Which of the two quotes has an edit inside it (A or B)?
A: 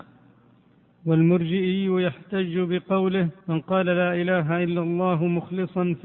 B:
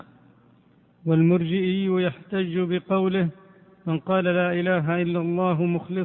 A